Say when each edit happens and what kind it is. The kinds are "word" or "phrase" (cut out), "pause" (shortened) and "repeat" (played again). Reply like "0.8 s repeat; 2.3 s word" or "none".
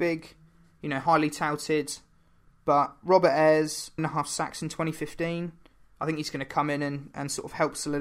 4.0 s word